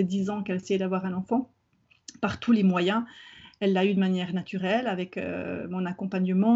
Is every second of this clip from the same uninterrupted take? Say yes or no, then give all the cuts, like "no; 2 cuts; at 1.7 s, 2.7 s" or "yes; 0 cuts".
yes; 0 cuts